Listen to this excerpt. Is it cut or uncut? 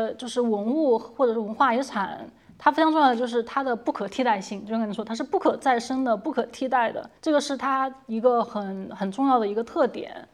cut